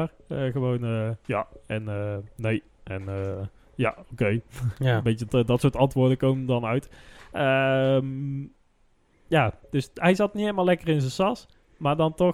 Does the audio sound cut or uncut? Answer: cut